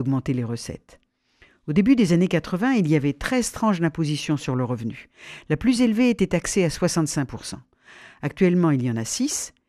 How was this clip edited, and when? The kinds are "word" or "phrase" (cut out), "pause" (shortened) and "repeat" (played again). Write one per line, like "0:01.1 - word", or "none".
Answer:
none